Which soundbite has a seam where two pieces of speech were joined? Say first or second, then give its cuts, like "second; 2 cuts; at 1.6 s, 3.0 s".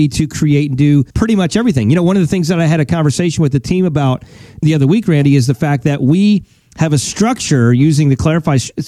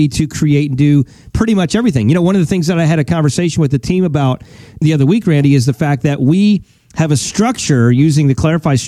first; 1 cut; at 1.1 s